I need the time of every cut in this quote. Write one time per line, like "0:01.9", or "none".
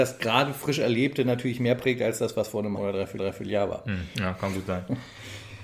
0:02.8
0:03.2